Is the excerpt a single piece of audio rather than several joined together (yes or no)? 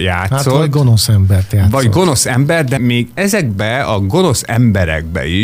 no